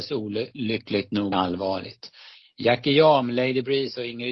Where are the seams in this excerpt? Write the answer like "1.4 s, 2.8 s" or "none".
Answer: 1.3 s